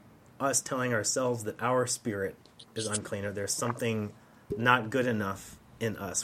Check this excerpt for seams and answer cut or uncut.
uncut